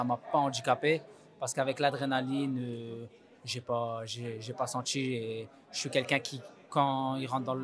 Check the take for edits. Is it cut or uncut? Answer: uncut